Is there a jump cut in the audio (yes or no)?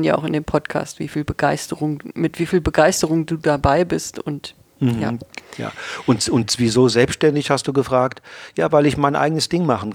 no